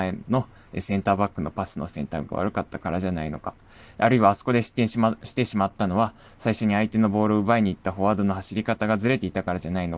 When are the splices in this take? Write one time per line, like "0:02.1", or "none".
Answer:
none